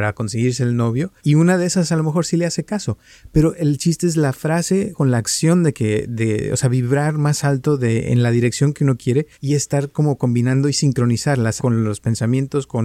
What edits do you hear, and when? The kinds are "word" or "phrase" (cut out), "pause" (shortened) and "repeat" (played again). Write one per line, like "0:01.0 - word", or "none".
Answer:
0:01.2 - pause
0:04.9 - word
0:09.3 - pause
0:11.6 - word